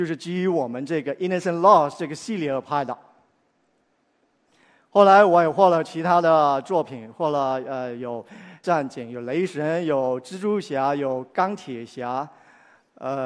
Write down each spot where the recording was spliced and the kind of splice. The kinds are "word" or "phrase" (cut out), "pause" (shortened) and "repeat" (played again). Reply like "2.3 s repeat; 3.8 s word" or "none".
8.6 s word